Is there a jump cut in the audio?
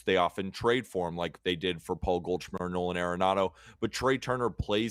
no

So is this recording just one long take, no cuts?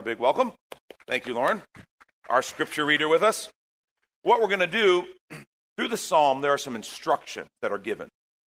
yes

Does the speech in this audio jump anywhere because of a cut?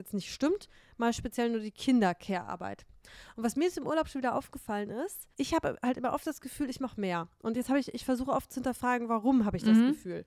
yes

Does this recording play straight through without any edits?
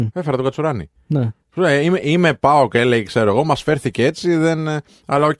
yes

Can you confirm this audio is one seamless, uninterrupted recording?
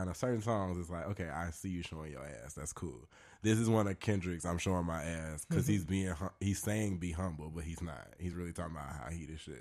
yes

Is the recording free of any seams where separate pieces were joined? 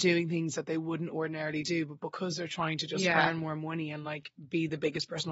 yes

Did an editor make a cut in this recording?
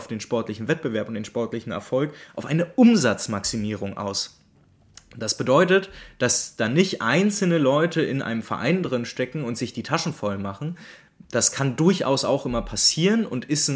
no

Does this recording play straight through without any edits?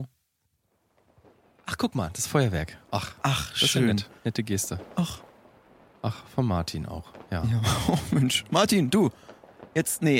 yes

